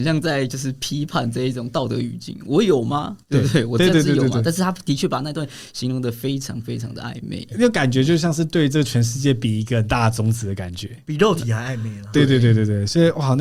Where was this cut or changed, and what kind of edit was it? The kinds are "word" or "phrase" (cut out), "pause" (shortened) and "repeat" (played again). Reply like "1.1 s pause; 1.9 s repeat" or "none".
3.2 s pause